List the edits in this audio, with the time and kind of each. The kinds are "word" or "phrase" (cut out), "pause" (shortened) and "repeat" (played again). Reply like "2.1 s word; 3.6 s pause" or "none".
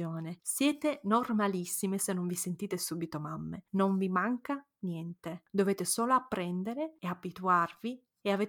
none